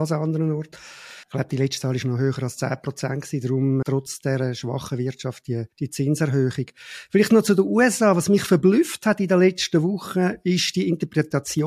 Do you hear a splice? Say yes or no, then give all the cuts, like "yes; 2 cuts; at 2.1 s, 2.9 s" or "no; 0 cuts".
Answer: yes; 3 cuts; at 1.2 s, 3.8 s, 5.7 s